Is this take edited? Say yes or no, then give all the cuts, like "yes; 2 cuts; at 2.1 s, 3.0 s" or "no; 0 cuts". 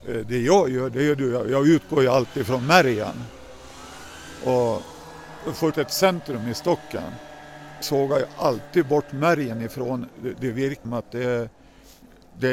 yes; 3 cuts; at 5.7 s, 7.8 s, 10.8 s